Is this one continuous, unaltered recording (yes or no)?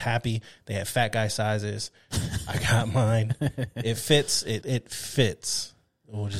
no